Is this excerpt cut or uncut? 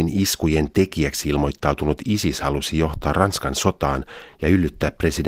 uncut